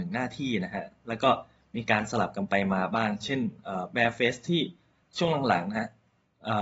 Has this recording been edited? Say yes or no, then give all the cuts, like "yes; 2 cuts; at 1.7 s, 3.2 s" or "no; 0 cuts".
no; 0 cuts